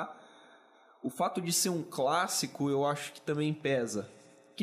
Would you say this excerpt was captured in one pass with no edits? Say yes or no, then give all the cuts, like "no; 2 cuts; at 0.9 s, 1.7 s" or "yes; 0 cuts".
yes; 0 cuts